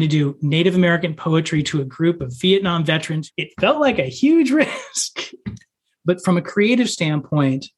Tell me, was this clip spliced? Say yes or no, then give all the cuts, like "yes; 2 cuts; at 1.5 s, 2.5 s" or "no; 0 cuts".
no; 0 cuts